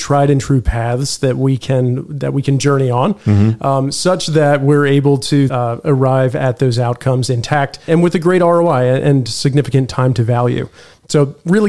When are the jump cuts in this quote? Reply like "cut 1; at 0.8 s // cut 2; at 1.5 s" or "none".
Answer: cut 1; at 5.5 s // cut 2; at 7.9 s